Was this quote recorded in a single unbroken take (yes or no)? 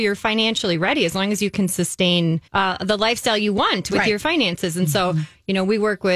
no